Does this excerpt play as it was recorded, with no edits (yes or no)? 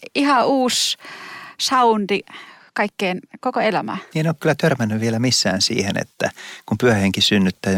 yes